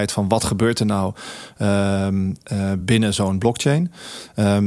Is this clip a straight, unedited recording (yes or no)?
yes